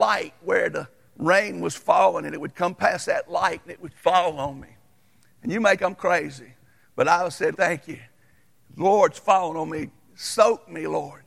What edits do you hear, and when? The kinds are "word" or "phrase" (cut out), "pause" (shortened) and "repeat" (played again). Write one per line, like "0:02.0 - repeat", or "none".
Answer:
0:03.9 - word
0:05.8 - word
0:07.5 - word